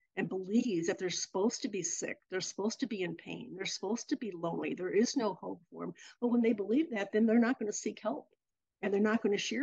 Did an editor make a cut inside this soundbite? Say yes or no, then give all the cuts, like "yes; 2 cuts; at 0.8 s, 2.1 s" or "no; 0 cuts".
no; 0 cuts